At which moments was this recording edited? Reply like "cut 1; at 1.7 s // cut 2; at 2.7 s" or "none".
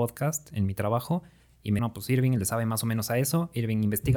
cut 1; at 1.8 s